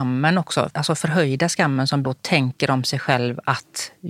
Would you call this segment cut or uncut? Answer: cut